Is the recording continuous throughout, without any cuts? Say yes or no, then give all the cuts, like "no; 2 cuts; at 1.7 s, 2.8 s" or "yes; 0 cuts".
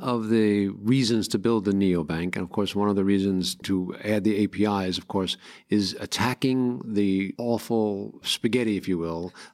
yes; 0 cuts